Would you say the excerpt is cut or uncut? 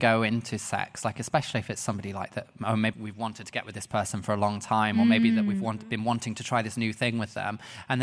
cut